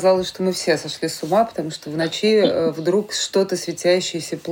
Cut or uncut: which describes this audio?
uncut